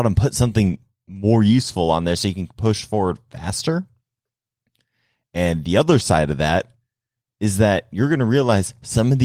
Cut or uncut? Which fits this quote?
uncut